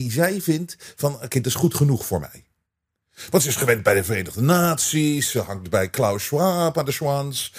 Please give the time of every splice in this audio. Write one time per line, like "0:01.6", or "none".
none